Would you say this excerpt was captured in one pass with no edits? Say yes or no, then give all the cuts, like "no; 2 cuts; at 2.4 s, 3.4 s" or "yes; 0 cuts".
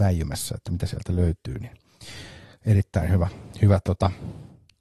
yes; 0 cuts